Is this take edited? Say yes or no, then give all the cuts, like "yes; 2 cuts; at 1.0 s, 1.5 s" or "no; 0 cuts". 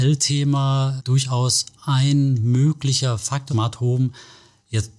yes; 3 cuts; at 1.0 s, 1.8 s, 3.5 s